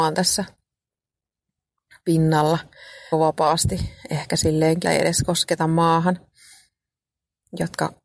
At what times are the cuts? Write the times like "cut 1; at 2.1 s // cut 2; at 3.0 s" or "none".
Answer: cut 1; at 3.1 s // cut 2; at 4.8 s